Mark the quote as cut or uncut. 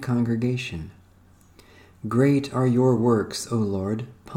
uncut